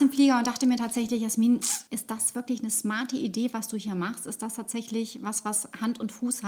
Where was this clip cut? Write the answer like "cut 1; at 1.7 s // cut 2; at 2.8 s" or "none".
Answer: cut 1; at 1.9 s